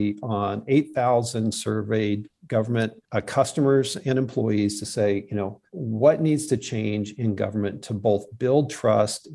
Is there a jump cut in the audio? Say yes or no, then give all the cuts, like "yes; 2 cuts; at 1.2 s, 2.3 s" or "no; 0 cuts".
yes; 2 cuts; at 3.0 s, 5.7 s